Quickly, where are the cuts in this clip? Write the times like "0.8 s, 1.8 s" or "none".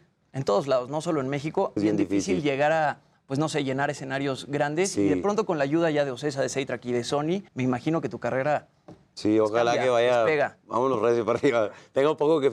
1.8 s, 7.5 s